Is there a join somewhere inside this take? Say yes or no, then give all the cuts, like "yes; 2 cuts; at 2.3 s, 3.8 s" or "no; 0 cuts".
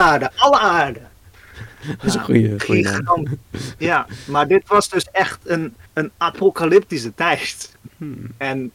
yes; 2 cuts; at 3.4 s, 5.9 s